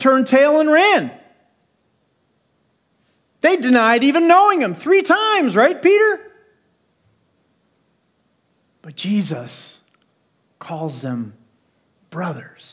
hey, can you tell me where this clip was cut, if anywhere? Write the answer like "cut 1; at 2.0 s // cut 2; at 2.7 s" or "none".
none